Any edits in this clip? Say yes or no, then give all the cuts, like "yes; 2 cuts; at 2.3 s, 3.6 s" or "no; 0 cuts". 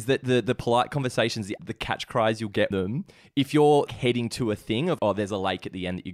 yes; 4 cuts; at 1.6 s, 2.7 s, 3.9 s, 5.0 s